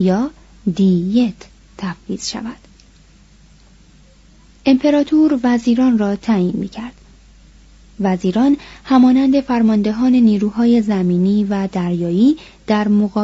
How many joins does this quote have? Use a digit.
0